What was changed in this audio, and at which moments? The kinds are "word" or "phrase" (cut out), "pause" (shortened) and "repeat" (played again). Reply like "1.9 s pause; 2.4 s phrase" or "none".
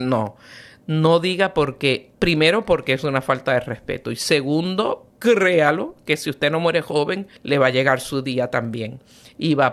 2.1 s pause; 5.1 s pause; 7.4 s pause